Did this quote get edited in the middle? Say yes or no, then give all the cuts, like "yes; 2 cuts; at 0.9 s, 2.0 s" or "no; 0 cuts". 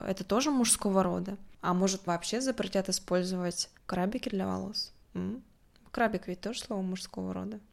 yes; 3 cuts; at 2.1 s, 3.8 s, 5.0 s